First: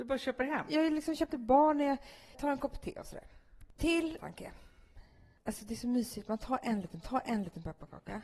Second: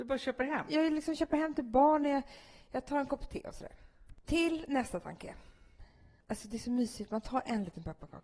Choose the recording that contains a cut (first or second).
first